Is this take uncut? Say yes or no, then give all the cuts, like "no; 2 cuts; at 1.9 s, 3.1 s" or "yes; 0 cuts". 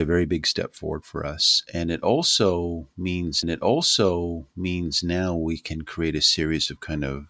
no; 1 cut; at 3.4 s